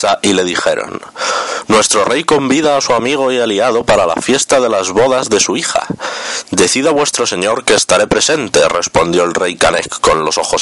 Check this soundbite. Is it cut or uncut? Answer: uncut